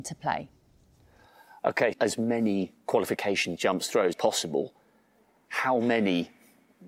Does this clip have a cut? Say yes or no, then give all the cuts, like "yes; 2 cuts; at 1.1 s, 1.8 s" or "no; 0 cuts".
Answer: yes; 3 cuts; at 1.9 s, 3.6 s, 4.1 s